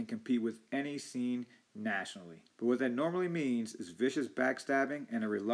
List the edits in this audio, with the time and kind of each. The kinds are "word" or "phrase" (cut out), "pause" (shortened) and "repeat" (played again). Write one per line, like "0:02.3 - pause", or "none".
0:02.5 - pause